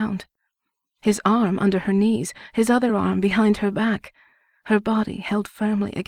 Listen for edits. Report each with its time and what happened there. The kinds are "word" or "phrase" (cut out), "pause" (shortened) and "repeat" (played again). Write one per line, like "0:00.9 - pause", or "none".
none